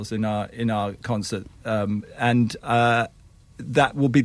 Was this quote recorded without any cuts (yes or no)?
yes